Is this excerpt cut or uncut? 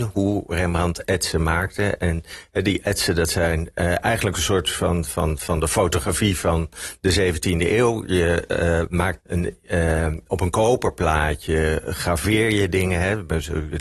cut